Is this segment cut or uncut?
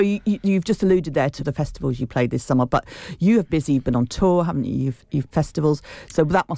cut